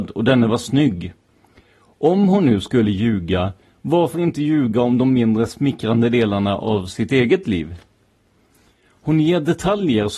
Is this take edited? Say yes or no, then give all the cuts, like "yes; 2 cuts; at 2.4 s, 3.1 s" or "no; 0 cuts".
no; 0 cuts